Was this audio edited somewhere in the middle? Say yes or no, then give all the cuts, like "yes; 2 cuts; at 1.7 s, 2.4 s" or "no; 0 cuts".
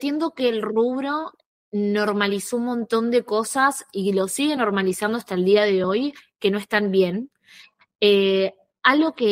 no; 0 cuts